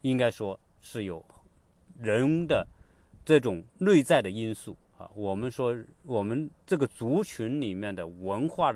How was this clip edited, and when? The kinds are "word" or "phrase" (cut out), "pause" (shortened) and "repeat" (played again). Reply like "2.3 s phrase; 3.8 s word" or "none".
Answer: 3.7 s pause; 4.9 s pause